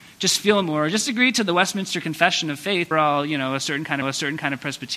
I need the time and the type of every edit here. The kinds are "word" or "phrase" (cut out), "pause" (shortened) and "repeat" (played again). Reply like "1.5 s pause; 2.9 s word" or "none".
2.9 s phrase; 4.0 s repeat